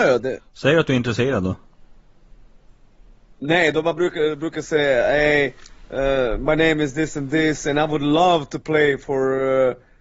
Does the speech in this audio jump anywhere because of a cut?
no; 0 cuts

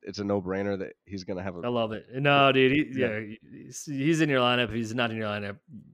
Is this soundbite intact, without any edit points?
yes; 0 cuts

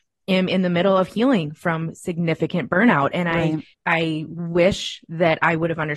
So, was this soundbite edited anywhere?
yes; 1 cut; at 3.7 s

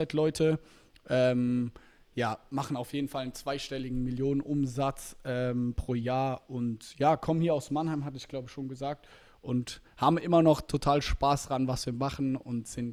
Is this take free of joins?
yes; 0 cuts

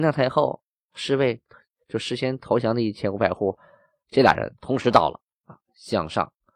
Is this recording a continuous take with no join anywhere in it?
yes; 0 cuts

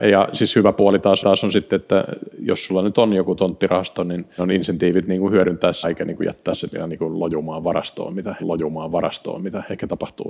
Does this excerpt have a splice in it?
yes; 4 cuts; at 1.2 s, 4.4 s, 5.8 s, 8.4 s

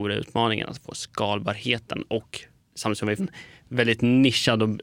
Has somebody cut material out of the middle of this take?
yes; 2 cuts; at 2.6 s, 3.2 s

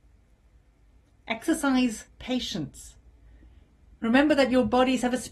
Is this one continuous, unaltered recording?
no; 1 cut; at 2.1 s

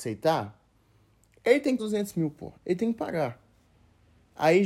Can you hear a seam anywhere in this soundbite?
yes; 2 cuts; at 1.8 s, 2.5 s

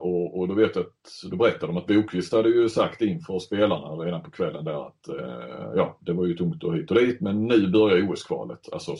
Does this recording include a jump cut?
no; 0 cuts

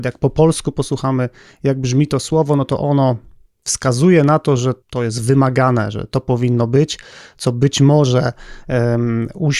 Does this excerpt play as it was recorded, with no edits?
no; 1 cut; at 4.8 s

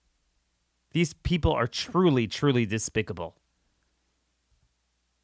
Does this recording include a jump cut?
no; 0 cuts

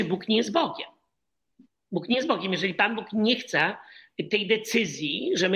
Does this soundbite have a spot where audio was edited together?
no; 0 cuts

